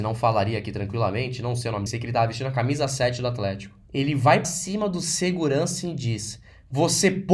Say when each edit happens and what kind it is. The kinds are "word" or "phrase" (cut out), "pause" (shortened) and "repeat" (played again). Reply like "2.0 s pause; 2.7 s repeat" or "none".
1.9 s word; 3.8 s pause; 4.4 s word